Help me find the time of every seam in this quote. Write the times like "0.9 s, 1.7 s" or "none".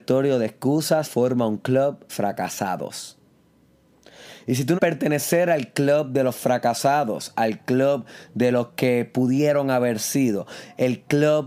1.0 s, 2.1 s, 4.8 s